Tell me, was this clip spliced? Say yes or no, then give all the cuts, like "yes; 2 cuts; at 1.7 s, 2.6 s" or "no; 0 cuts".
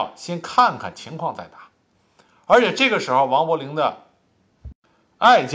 no; 0 cuts